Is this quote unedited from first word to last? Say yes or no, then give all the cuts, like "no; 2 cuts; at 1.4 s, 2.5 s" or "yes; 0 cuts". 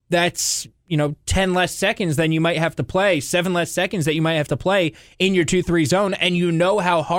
yes; 0 cuts